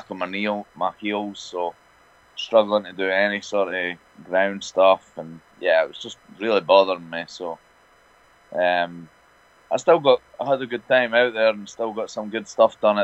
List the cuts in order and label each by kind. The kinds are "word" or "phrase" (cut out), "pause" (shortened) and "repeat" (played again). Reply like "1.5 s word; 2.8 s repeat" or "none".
none